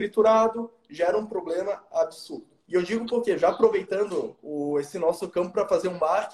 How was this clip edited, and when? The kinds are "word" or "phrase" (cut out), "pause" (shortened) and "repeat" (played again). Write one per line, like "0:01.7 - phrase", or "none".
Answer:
0:02.6 - pause